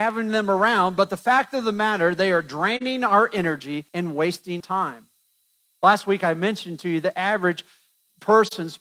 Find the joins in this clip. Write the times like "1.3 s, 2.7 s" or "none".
3.9 s, 4.6 s